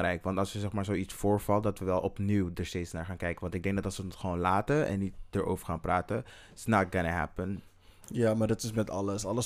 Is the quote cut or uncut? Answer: uncut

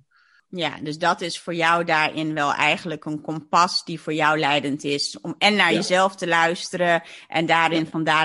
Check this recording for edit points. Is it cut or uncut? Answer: uncut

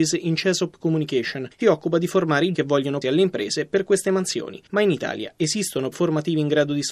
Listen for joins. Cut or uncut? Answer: cut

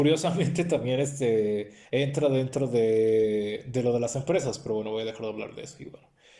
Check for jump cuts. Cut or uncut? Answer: cut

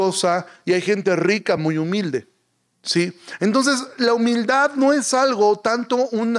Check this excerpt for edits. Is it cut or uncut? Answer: uncut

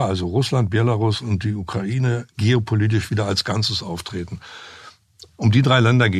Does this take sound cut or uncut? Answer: uncut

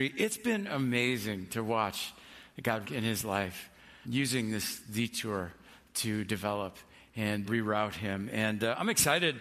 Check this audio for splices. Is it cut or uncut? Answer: cut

